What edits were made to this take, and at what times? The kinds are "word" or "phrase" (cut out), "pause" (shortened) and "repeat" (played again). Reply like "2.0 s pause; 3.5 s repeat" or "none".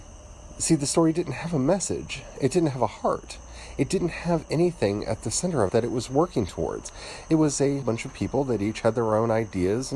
5.7 s word; 7.8 s word